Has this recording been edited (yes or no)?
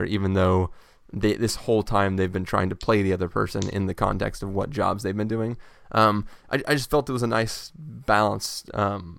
no